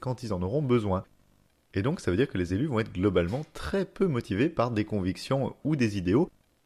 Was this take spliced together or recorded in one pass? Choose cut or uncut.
uncut